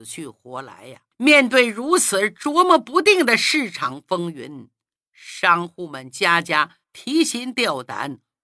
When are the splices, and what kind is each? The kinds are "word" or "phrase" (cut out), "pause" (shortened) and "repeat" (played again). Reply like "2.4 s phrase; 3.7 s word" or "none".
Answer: 1.1 s pause; 6.8 s pause